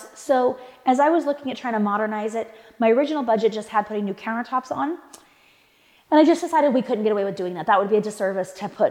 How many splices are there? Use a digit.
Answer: 0